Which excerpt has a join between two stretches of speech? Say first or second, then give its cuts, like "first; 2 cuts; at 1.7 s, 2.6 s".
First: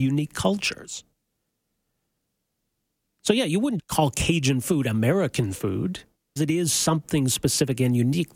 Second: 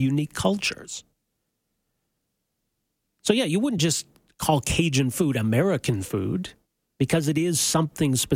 first; 2 cuts; at 3.8 s, 6.4 s